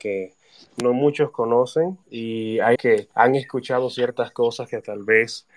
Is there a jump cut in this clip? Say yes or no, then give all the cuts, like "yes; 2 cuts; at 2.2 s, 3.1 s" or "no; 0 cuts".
yes; 3 cuts; at 2.0 s, 2.7 s, 3.1 s